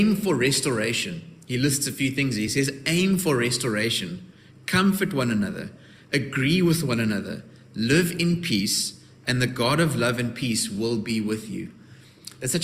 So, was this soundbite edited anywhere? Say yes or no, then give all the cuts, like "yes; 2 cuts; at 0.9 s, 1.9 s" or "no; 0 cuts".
no; 0 cuts